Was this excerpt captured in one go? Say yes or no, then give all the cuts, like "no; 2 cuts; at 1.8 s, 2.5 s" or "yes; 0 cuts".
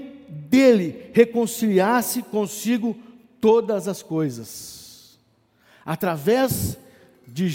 yes; 0 cuts